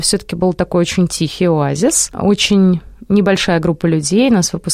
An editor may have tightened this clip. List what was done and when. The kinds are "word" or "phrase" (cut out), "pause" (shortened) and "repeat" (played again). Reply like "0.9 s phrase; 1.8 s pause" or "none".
none